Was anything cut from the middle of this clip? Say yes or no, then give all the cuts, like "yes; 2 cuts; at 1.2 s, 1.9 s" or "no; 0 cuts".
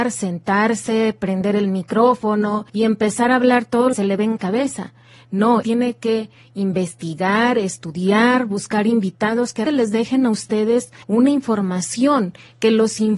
yes; 6 cuts; at 2.7 s, 3.9 s, 4.4 s, 5.6 s, 9.7 s, 11.0 s